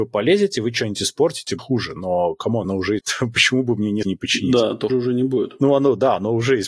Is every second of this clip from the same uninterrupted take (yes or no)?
no